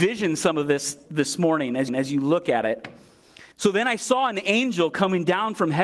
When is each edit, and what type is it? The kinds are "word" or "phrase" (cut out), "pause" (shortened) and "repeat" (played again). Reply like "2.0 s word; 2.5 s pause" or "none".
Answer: 1.9 s repeat; 3.5 s pause